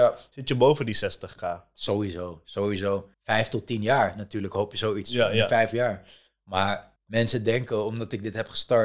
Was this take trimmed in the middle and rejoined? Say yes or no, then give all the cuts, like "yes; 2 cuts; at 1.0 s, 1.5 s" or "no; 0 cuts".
yes; 2 cuts; at 3.1 s, 7.0 s